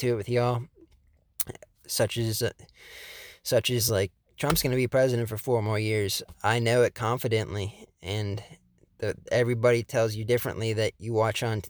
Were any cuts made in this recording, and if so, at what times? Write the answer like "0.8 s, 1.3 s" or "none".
none